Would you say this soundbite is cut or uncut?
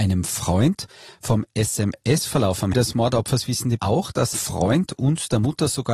cut